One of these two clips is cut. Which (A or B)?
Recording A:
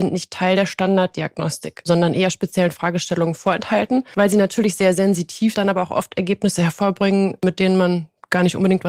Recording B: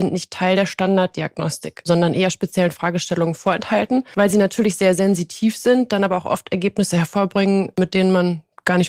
A